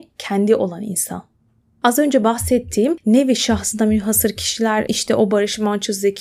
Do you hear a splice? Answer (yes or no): no